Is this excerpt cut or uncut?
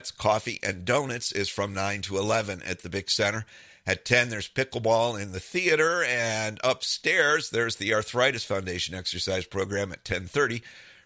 uncut